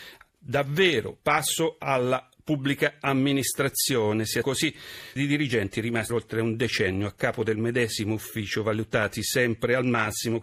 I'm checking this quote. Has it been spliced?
yes; 3 cuts; at 4.4 s, 5.2 s, 6.1 s

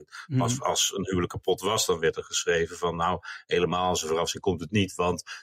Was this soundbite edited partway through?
no; 0 cuts

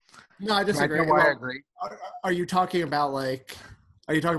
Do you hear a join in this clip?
no; 0 cuts

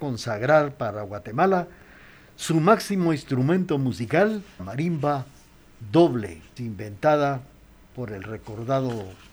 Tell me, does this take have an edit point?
yes; 2 cuts; at 4.6 s, 6.6 s

